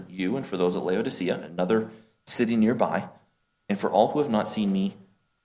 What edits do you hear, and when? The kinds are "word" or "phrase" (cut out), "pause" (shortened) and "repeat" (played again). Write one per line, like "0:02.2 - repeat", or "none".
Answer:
none